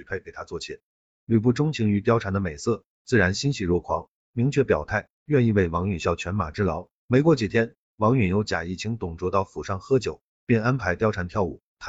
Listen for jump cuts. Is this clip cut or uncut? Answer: uncut